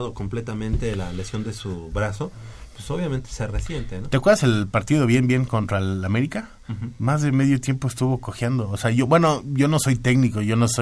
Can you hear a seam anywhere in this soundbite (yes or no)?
no